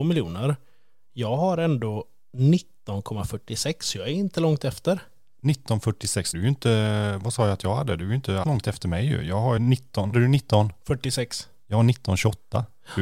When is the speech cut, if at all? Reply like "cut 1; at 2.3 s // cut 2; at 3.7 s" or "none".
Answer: cut 1; at 6.3 s // cut 2; at 8.4 s // cut 3; at 9.6 s // cut 4; at 10.1 s